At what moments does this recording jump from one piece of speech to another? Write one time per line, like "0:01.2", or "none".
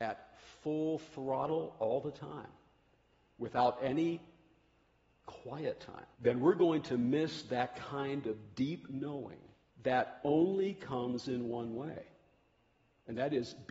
0:06.1
0:09.7